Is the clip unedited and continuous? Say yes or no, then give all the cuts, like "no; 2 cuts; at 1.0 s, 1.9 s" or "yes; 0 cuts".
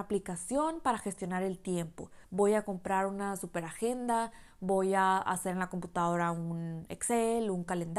no; 1 cut; at 2.2 s